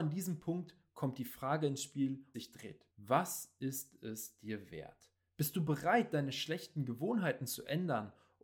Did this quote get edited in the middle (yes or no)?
yes